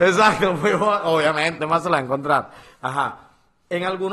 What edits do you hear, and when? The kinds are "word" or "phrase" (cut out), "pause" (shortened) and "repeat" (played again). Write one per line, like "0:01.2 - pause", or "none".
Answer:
0:01.6 - word